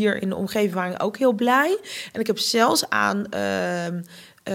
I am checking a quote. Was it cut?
no; 0 cuts

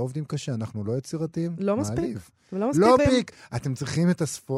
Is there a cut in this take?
yes; 1 cut; at 3.0 s

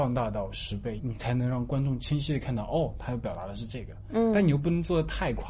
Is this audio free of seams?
no; 1 cut; at 1.0 s

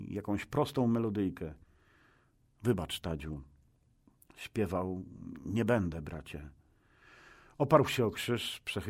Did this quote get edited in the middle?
no; 0 cuts

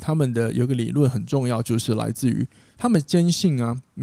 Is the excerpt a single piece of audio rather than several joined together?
yes; 0 cuts

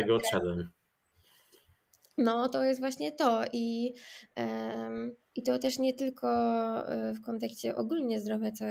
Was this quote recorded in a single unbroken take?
no; 1 cut; at 5.2 s

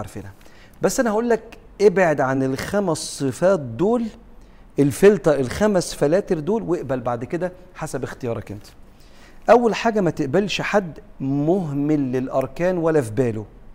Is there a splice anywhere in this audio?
no; 0 cuts

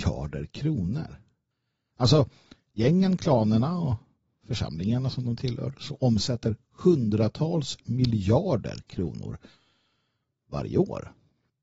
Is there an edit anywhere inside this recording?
no; 0 cuts

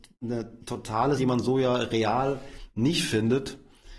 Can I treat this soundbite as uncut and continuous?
no; 1 cut; at 1.2 s

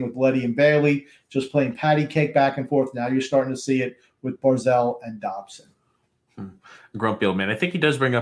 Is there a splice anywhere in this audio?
no; 0 cuts

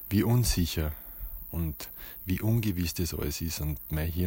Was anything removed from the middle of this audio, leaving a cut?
no; 0 cuts

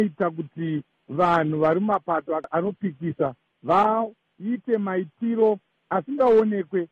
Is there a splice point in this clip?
no; 0 cuts

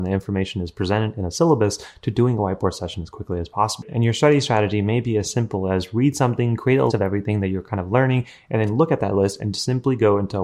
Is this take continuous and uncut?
no; 1 cut; at 6.9 s

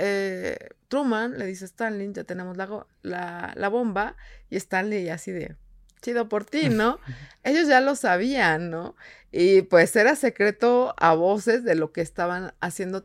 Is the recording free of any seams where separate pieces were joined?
yes; 0 cuts

